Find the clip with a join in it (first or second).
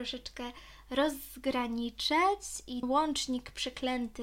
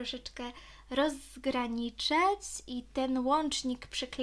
first